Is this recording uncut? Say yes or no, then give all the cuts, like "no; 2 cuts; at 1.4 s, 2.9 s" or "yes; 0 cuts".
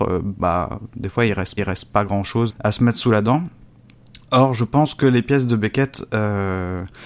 no; 2 cuts; at 1.6 s, 2.5 s